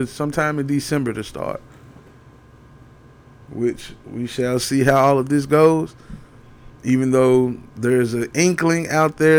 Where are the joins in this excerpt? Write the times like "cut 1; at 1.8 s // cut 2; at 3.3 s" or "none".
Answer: none